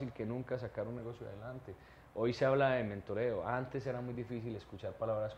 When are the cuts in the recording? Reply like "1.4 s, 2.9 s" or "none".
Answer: none